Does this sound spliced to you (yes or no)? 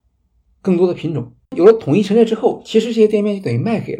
yes